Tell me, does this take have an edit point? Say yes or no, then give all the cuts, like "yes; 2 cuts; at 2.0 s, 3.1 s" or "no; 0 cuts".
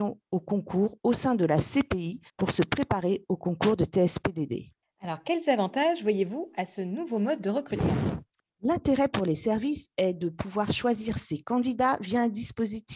yes; 1 cut; at 2.3 s